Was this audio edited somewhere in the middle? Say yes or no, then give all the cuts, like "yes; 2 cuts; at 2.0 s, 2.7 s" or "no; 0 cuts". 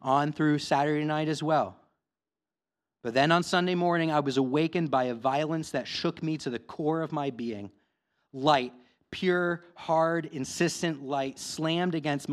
no; 0 cuts